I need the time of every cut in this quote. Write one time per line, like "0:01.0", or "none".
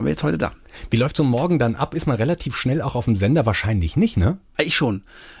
none